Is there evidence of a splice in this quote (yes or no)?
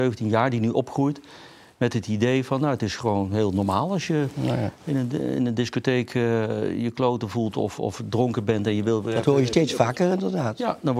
no